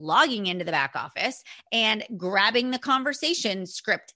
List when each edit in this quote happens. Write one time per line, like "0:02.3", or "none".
none